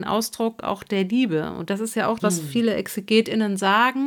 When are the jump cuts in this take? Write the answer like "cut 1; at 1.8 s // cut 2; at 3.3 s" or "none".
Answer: cut 1; at 2.2 s